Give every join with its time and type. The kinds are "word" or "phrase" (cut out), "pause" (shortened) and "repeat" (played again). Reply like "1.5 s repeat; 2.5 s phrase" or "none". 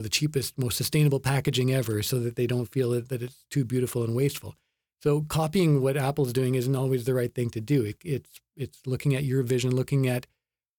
none